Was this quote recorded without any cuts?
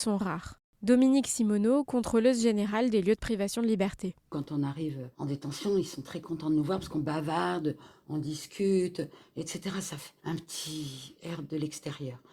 no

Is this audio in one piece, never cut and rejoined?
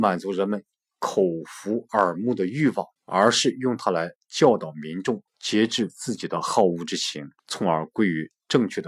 no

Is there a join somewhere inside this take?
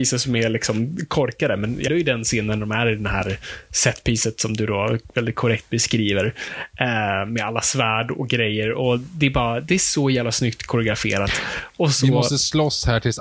yes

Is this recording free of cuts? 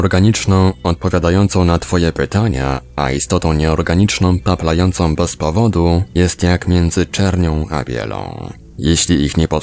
yes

